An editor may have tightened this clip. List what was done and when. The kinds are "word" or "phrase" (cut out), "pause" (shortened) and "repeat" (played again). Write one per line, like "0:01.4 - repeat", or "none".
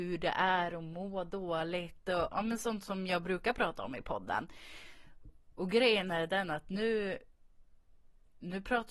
none